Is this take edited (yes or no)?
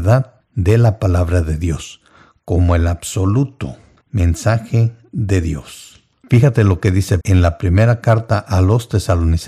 yes